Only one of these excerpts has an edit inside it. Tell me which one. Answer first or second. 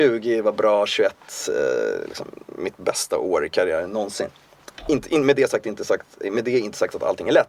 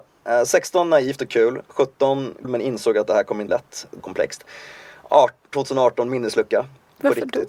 second